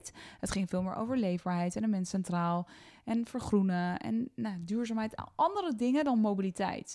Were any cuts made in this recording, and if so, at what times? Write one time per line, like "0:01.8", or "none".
none